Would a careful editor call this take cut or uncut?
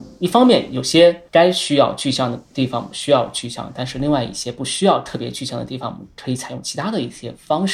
cut